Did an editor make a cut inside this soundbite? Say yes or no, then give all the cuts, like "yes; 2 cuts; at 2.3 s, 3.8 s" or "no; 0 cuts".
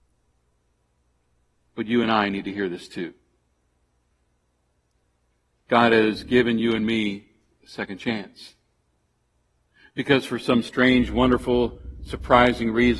no; 0 cuts